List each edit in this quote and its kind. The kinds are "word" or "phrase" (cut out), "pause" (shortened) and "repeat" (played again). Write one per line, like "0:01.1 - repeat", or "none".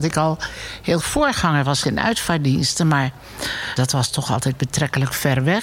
0:01.0 - word
0:01.8 - word
0:03.8 - word